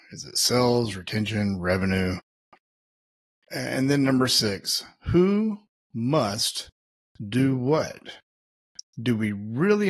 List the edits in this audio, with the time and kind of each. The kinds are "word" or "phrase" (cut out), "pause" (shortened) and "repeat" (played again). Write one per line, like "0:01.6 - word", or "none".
none